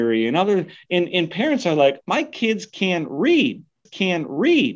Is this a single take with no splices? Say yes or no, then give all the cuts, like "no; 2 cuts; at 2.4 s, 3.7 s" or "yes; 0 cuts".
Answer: no; 2 cuts; at 2.0 s, 3.9 s